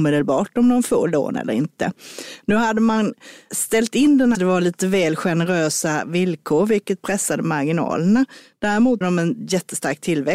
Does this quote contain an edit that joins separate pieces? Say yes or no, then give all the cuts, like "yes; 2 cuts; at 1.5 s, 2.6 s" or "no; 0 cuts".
yes; 2 cuts; at 4.3 s, 9.0 s